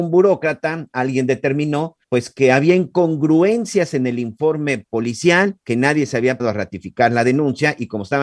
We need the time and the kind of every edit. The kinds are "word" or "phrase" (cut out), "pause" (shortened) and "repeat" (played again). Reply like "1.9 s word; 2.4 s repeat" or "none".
2.0 s pause; 5.6 s pause; 6.4 s word